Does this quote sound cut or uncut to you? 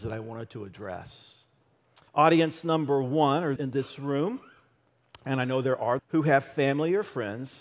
cut